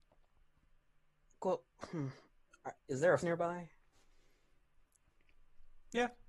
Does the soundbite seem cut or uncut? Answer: cut